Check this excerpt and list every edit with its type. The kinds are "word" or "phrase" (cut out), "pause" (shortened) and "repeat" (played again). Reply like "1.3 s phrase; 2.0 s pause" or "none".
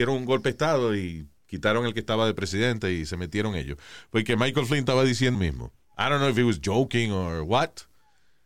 5.3 s word